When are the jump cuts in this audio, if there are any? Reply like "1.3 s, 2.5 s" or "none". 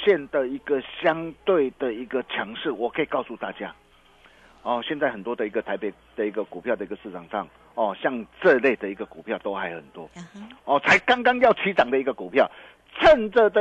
7.5 s